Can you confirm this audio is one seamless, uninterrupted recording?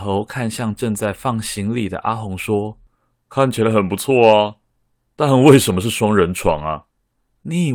yes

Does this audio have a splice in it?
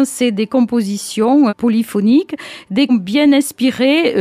yes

